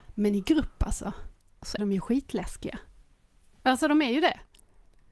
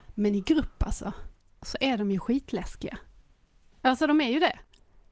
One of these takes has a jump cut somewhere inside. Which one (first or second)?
first